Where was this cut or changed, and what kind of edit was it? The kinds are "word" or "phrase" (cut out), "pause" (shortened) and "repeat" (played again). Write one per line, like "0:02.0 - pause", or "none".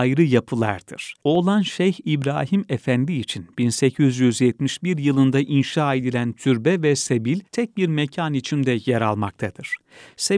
0:01.2 - pause
0:07.4 - pause

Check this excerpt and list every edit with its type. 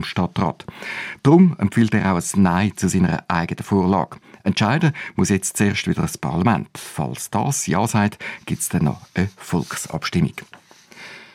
none

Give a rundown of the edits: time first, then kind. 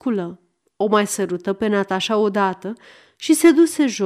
none

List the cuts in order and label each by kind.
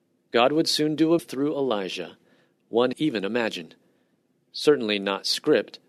0:01.2 - word
0:02.9 - phrase

